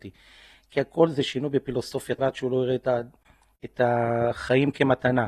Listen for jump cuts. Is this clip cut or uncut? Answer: cut